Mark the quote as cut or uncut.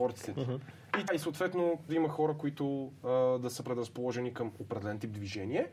cut